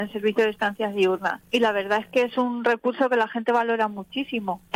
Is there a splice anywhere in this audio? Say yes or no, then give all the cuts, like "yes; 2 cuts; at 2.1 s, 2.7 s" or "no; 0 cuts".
yes; 1 cut; at 1.5 s